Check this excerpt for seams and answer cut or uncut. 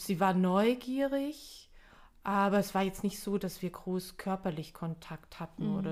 uncut